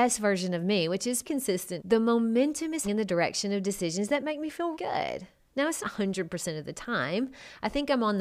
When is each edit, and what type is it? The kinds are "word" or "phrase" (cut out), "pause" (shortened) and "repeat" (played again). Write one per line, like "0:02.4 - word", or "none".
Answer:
0:01.2 - word
0:01.8 - word
0:02.8 - word
0:04.7 - word
0:05.8 - word